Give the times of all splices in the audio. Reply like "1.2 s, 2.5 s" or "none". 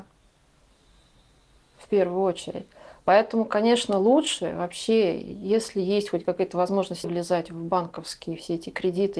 7.0 s